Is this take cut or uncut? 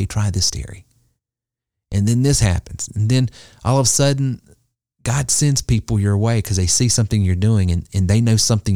uncut